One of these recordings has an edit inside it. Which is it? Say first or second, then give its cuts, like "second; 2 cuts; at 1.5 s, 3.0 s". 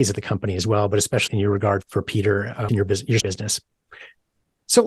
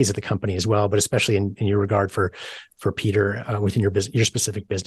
first; 4 cuts; at 1.3 s, 1.8 s, 2.7 s, 3.2 s